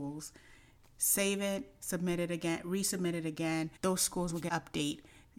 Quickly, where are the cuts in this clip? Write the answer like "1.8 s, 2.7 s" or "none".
3.8 s, 4.5 s